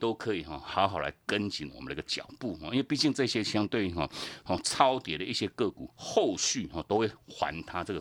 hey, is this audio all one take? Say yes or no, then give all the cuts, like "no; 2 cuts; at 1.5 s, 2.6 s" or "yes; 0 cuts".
no; 1 cut; at 5.9 s